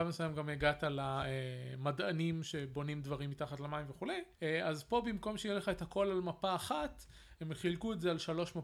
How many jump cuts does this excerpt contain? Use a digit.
1